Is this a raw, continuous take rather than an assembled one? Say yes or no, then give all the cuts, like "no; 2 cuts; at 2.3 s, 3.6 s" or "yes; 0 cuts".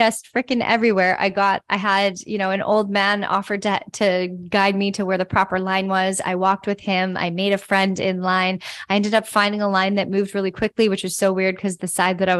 yes; 0 cuts